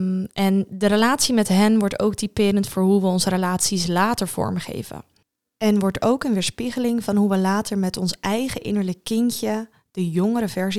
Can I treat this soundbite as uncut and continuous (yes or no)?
yes